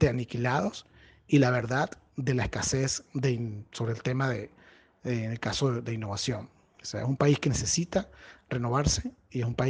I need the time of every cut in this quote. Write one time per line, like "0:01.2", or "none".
none

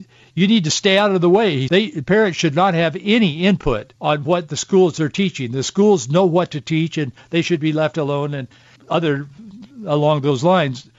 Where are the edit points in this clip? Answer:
0:01.7
0:04.0
0:08.8

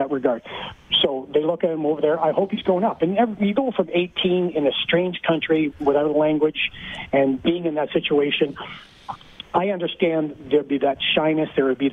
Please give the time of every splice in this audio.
0:05.7

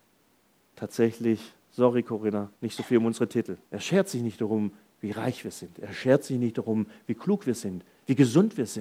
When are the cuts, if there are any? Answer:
0:01.6
0:02.5
0:03.6

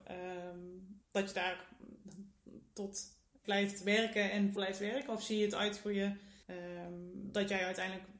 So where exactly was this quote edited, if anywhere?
0:01.0
0:03.4
0:04.6
0:06.4

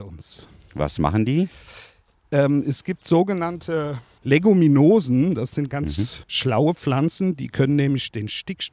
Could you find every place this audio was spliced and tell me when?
none

